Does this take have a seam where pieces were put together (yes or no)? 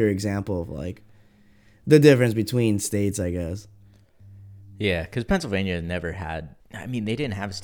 yes